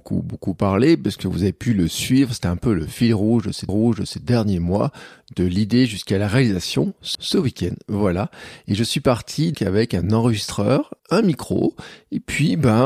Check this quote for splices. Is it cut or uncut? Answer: cut